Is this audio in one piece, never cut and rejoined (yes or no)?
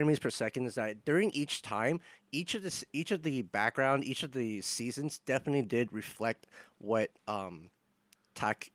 yes